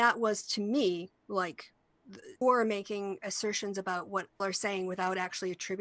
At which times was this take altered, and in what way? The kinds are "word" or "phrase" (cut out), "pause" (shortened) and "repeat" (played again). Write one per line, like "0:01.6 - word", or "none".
0:02.4 - word
0:04.4 - word